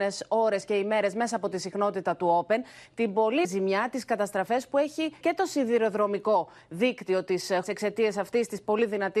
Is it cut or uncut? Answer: cut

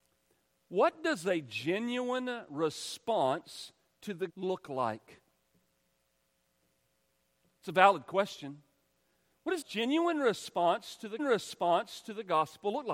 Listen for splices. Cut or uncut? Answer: cut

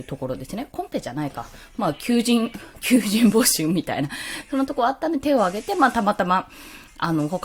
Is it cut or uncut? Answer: uncut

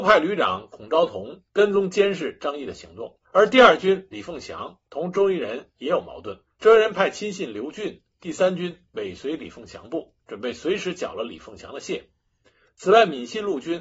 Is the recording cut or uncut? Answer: cut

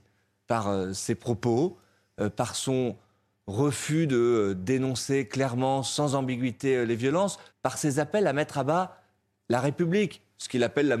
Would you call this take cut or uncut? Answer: cut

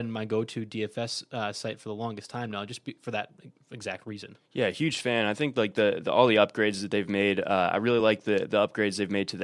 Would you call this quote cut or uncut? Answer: uncut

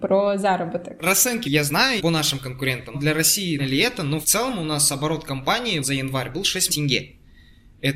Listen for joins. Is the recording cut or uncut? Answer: cut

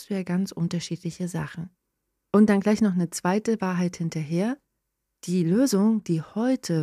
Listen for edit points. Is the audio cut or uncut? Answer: uncut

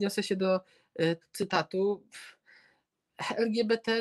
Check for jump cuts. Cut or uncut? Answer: cut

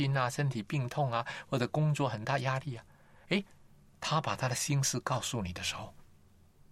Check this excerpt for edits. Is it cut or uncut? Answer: uncut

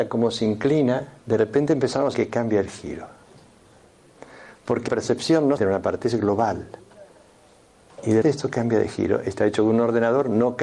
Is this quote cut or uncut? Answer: cut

